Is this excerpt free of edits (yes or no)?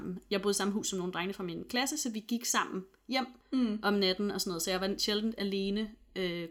no